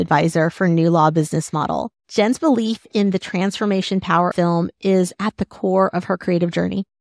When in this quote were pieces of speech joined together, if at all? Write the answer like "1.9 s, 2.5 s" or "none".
2.0 s, 4.3 s